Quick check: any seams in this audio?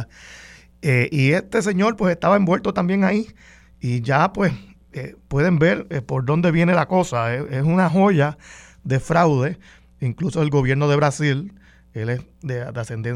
no; 0 cuts

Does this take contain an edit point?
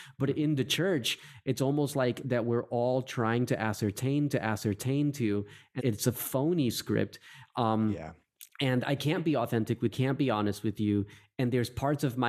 yes; 4 cuts; at 2.2 s, 4.3 s, 5.8 s, 9.9 s

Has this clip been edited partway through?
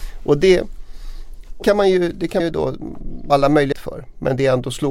yes; 4 cuts; at 1.6 s, 2.4 s, 3.3 s, 3.7 s

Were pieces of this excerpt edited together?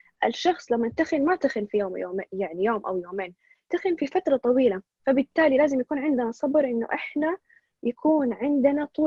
no; 0 cuts

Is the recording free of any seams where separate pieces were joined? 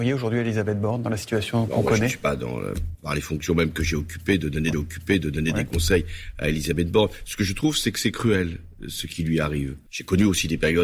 no; 4 cuts; at 1.7 s, 2.9 s, 4.7 s, 9.9 s

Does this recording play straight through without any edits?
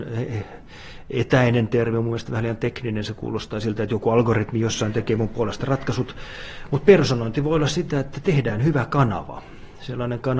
yes; 0 cuts

